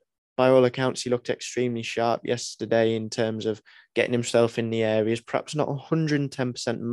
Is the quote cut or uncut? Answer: uncut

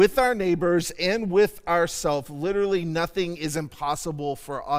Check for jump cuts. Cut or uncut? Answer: uncut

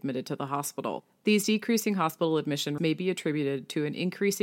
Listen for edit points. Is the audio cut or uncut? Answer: cut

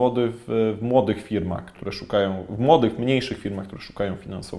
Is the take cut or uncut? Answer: uncut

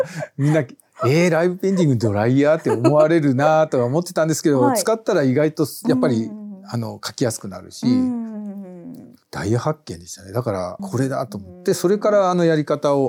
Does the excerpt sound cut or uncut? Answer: cut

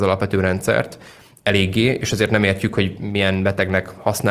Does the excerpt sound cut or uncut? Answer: uncut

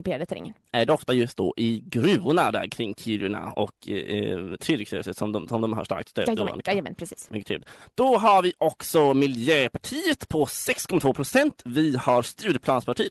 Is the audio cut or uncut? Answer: uncut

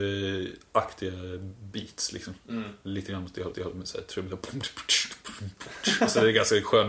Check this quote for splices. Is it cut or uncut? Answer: cut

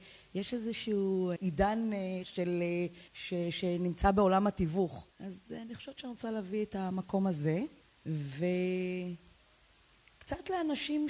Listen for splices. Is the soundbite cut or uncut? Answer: cut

